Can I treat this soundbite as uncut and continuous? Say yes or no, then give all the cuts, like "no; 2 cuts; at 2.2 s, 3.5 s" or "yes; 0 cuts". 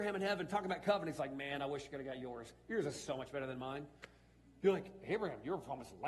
yes; 0 cuts